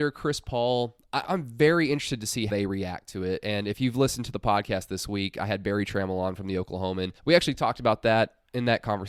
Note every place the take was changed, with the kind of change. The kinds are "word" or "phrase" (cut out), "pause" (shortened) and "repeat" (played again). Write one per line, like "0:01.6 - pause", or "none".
0:01.2 - word
0:02.5 - word
0:07.2 - pause